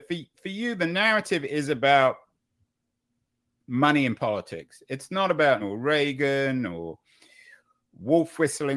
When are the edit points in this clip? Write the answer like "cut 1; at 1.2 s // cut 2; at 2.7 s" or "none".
cut 1; at 5.6 s